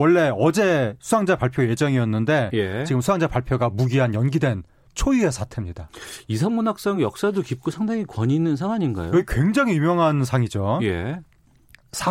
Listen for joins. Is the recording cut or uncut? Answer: uncut